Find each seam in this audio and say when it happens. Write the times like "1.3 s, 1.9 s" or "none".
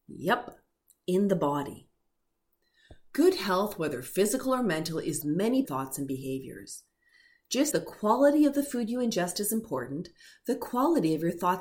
5.2 s, 5.7 s, 7.7 s